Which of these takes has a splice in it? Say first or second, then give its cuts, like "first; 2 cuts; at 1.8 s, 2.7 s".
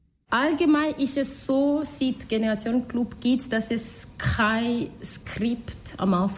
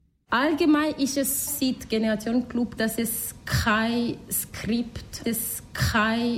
second; 3 cuts; at 1.5 s, 2.8 s, 5.2 s